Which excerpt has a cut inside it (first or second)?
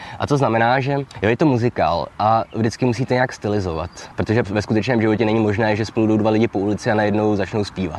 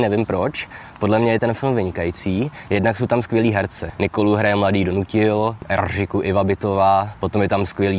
first